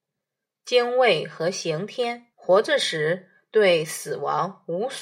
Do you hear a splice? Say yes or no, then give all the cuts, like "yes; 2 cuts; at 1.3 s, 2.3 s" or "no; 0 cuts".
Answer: yes; 1 cut; at 2.3 s